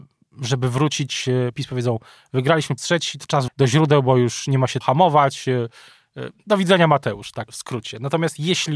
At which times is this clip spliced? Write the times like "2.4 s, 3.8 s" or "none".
1.5 s, 2.8 s, 3.5 s, 4.8 s, 7.5 s